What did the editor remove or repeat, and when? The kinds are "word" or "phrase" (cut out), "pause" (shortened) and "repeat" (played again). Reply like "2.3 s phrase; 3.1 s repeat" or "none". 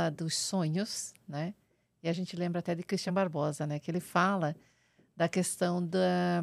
none